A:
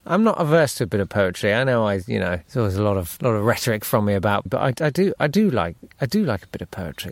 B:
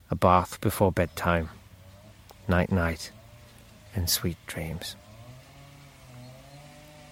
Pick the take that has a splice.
A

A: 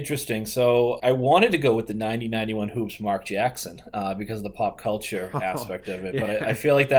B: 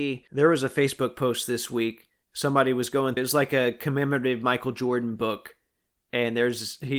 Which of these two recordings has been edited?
B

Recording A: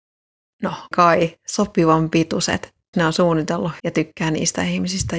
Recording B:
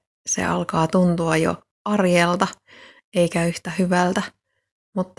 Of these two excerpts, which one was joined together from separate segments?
A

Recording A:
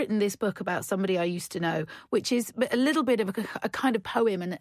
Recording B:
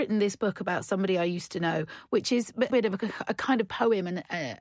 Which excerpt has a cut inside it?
B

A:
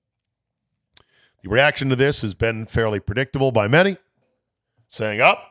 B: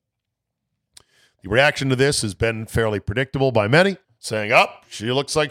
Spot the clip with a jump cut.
B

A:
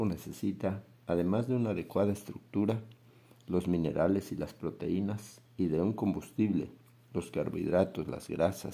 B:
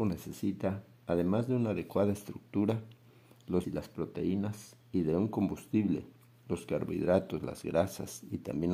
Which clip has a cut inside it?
B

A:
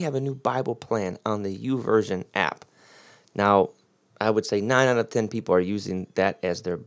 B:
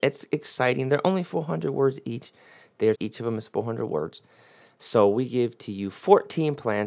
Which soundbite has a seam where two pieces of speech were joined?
B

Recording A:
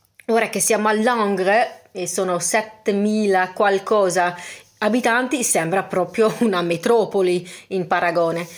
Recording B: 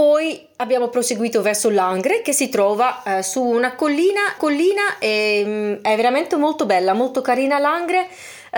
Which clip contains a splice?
B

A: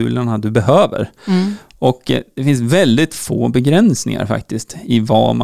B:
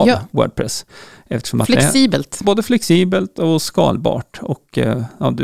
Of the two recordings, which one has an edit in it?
B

